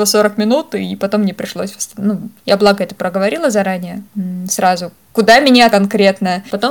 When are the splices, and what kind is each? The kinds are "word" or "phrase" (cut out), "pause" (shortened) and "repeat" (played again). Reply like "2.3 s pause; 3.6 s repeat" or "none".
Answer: 2.4 s pause; 5.7 s word